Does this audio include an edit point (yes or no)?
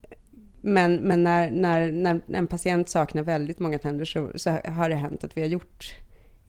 no